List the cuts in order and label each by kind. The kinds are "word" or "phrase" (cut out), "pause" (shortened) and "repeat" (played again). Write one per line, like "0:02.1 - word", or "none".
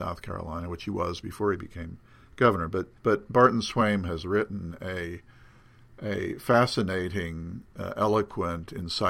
0:03.0 - pause